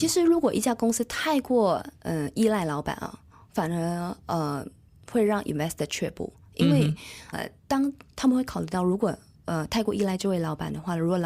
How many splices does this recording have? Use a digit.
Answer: 1